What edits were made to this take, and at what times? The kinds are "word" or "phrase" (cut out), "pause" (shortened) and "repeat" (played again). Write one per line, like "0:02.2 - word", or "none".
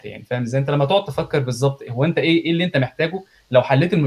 none